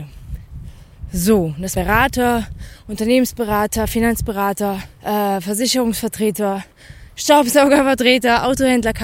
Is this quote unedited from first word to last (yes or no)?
no